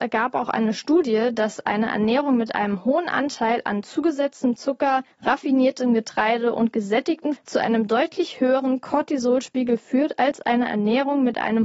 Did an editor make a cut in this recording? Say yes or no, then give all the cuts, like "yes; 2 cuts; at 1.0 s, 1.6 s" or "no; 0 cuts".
yes; 2 cuts; at 5.1 s, 7.4 s